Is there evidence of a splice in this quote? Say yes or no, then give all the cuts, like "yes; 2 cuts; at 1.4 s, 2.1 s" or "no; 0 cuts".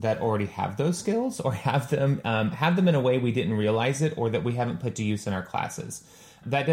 no; 0 cuts